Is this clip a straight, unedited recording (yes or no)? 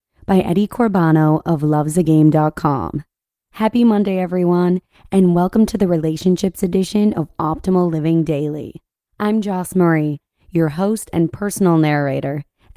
yes